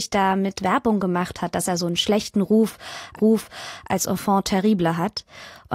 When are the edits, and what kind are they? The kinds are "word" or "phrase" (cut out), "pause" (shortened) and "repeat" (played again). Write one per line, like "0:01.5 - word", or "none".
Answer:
0:03.2 - repeat